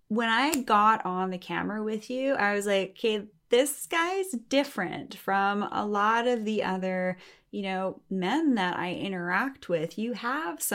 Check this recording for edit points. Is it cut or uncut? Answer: uncut